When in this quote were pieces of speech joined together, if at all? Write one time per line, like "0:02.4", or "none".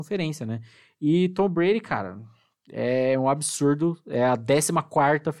none

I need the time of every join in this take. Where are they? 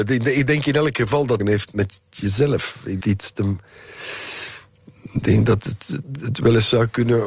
0:01.4
0:03.0

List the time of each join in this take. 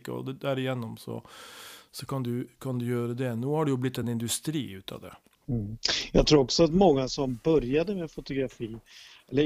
none

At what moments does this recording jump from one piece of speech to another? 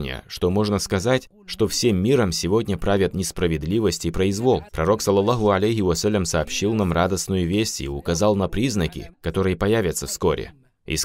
0:04.7
0:09.1

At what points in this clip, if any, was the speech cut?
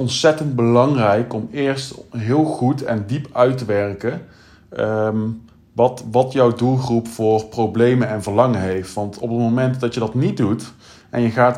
none

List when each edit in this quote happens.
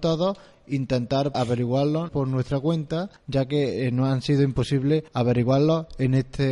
0:01.3
0:02.1
0:03.2
0:05.1

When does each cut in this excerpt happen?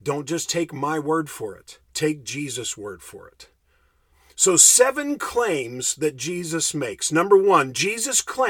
0:01.8

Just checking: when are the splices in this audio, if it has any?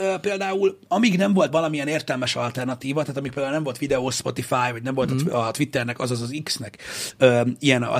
0:01.5

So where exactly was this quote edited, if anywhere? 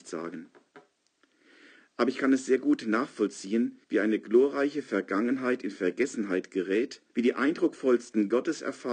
0:03.8
0:07.1

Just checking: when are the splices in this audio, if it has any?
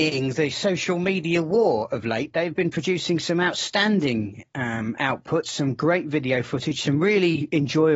none

